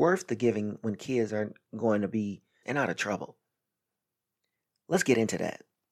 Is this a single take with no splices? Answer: no; 1 cut; at 2.6 s

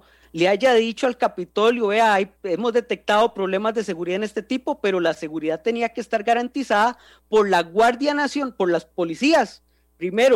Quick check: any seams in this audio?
no; 0 cuts

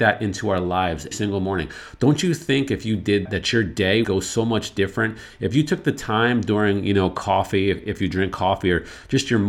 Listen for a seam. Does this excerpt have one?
yes; 3 cuts; at 1.1 s, 3.3 s, 4.0 s

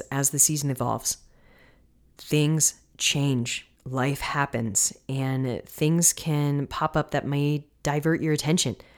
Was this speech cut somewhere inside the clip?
yes; 1 cut; at 3.8 s

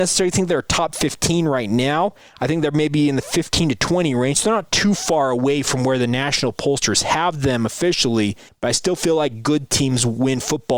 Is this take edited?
yes; 1 cut; at 8.5 s

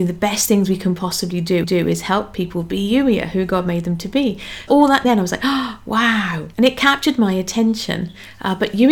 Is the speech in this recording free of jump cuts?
no; 4 cuts; at 1.6 s, 4.7 s, 5.0 s, 6.5 s

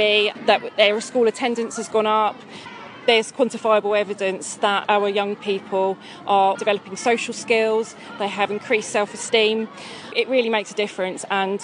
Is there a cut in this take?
yes; 1 cut; at 6.5 s

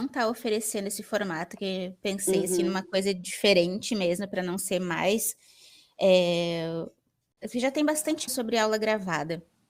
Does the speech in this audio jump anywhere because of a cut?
yes; 1 cut; at 8.3 s

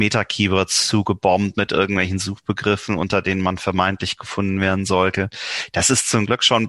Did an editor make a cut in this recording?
no; 0 cuts

